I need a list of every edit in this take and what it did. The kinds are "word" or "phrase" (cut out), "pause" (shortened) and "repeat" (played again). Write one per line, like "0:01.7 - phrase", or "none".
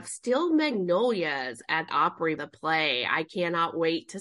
0:01.9 - word
0:02.4 - word

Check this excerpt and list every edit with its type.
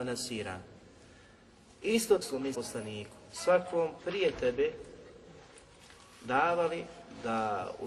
0:02.2 - word
0:02.5 - word
0:04.0 - word

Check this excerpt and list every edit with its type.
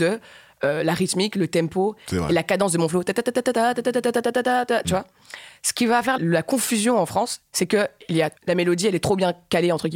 0:06.2 - word
0:08.4 - pause

